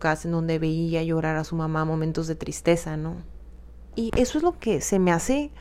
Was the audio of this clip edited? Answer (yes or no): yes